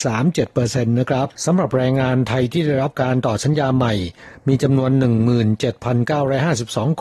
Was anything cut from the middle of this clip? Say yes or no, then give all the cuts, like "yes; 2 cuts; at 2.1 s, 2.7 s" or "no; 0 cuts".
yes; 1 cut; at 1.3 s